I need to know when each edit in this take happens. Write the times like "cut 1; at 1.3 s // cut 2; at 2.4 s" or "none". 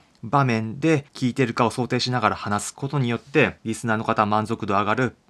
cut 1; at 1.1 s // cut 2; at 3.6 s